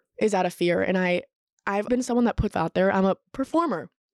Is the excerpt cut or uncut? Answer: cut